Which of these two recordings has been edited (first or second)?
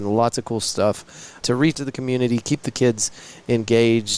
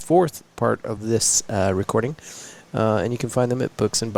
first